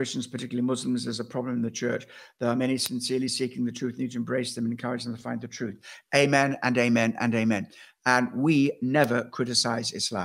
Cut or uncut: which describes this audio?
uncut